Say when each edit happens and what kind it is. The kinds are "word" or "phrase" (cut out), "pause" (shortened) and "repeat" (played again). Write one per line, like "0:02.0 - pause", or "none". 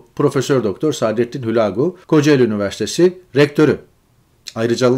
0:02.0 - pause